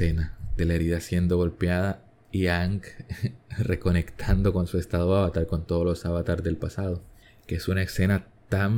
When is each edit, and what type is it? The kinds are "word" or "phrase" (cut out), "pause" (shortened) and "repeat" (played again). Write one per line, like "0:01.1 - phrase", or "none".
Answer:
none